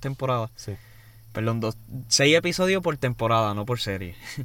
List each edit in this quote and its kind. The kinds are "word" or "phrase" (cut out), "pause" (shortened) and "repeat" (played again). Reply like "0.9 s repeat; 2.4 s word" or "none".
none